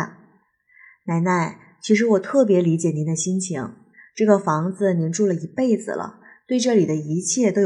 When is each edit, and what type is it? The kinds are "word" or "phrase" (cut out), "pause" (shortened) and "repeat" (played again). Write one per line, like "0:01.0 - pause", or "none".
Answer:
none